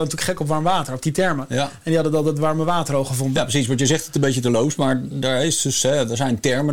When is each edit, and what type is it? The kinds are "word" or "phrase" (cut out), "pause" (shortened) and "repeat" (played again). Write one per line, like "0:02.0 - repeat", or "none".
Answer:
none